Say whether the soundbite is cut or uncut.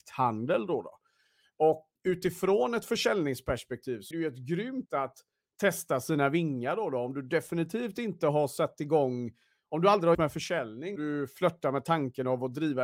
cut